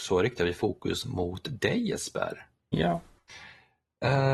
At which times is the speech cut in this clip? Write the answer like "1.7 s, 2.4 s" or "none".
none